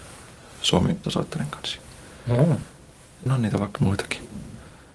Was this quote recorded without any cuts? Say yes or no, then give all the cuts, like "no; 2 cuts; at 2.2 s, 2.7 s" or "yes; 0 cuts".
no; 3 cuts; at 1.0 s, 3.3 s, 3.7 s